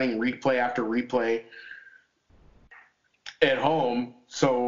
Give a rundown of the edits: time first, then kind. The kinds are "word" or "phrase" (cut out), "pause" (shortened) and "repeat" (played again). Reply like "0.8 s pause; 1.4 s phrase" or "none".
none